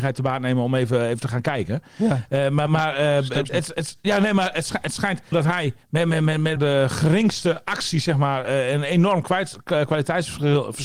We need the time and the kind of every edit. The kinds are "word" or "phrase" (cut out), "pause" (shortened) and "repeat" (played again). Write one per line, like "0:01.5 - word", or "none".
0:02.7 - word
0:03.5 - word
0:05.3 - word
0:05.8 - pause
0:06.6 - phrase